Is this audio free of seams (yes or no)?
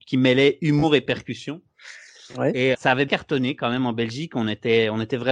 no